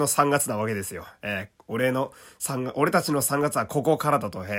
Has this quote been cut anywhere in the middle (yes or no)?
no